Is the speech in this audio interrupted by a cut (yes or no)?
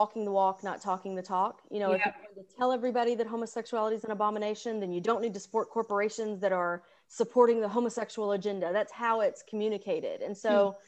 no